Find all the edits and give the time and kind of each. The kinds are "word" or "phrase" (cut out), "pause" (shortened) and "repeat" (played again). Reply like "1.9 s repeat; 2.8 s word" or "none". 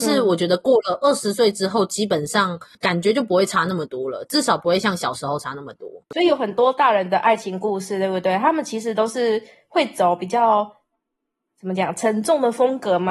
6.0 s pause